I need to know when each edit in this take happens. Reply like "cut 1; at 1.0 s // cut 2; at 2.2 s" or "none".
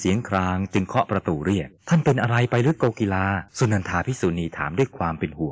cut 1; at 1.8 s // cut 2; at 3.5 s